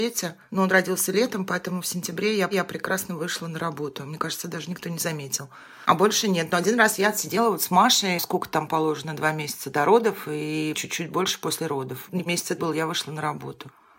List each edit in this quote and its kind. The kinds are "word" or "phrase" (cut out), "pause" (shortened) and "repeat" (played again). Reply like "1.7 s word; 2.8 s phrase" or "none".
2.5 s repeat; 12.3 s word; 12.6 s phrase